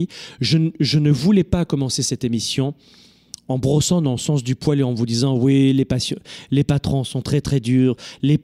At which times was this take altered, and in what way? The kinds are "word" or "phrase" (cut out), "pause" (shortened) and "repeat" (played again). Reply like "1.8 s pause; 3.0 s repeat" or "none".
none